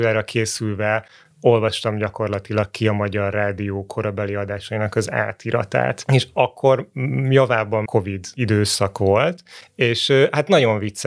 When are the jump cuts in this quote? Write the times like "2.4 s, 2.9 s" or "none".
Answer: 7.9 s